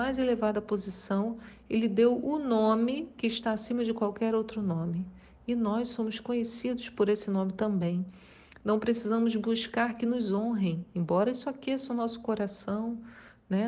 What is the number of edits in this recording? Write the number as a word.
zero